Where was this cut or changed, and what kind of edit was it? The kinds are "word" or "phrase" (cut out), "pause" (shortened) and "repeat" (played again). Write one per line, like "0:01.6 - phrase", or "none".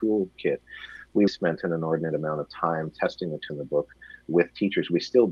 0:01.3 - word
0:03.5 - phrase